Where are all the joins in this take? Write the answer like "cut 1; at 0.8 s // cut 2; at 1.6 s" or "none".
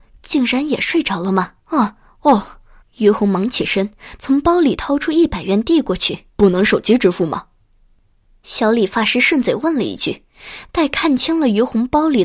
cut 1; at 1.6 s // cut 2; at 2.8 s // cut 3; at 6.3 s